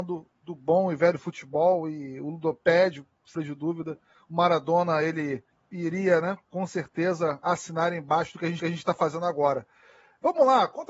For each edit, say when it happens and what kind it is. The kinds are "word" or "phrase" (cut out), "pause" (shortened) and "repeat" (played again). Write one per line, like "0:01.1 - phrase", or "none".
0:03.4 - word
0:05.5 - pause
0:06.4 - pause
0:08.6 - repeat